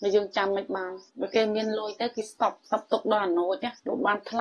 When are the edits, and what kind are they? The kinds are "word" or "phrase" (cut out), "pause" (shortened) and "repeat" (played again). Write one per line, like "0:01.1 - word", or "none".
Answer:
0:01.1 - pause
0:02.7 - phrase